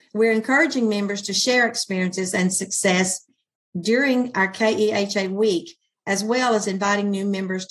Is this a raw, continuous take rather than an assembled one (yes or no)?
yes